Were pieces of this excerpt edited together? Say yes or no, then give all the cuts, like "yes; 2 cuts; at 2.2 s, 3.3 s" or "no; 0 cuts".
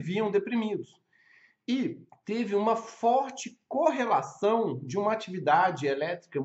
no; 0 cuts